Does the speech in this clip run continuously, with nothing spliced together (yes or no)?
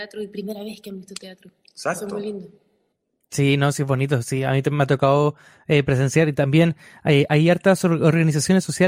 yes